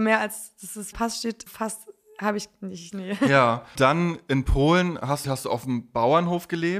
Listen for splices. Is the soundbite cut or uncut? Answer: cut